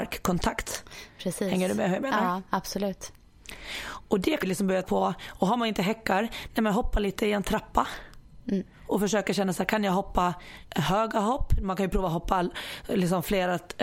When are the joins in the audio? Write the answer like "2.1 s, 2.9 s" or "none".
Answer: 4.4 s, 4.8 s